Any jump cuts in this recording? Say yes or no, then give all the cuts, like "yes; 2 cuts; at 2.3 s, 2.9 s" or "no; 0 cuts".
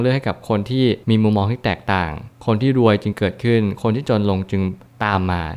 yes; 1 cut; at 1.0 s